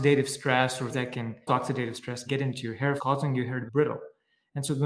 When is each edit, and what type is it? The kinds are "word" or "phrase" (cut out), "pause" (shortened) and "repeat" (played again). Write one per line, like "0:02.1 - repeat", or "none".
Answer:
0:00.9 - word
0:01.5 - word
0:02.3 - word
0:03.0 - word
0:03.7 - word